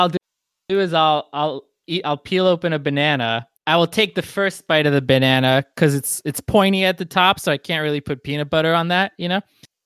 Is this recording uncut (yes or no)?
no